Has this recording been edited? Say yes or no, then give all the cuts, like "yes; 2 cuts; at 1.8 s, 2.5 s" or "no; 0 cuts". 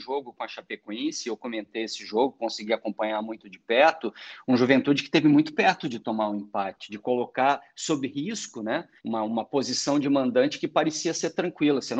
yes; 1 cut; at 9.0 s